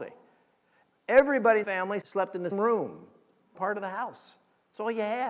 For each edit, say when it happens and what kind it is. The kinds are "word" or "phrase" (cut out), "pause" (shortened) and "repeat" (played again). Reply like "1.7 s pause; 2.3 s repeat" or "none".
1.6 s word; 2.0 s word; 2.5 s word; 3.5 s word